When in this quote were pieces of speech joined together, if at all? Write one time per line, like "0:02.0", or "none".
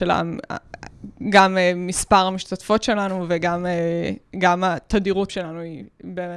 0:05.3